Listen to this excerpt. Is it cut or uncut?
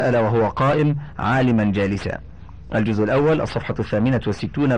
uncut